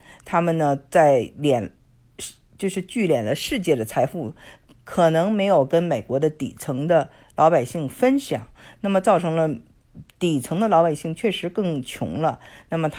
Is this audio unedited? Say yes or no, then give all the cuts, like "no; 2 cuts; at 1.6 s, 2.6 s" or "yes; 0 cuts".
yes; 0 cuts